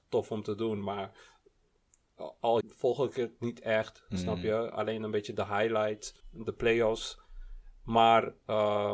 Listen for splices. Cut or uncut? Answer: cut